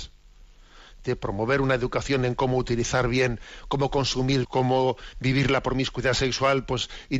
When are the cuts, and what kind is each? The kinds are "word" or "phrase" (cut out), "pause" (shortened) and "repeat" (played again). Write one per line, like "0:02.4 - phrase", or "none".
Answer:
0:04.4 - phrase